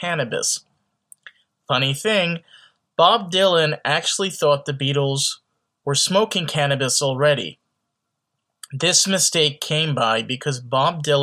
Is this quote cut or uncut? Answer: uncut